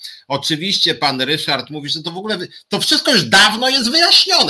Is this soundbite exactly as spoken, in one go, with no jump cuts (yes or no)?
yes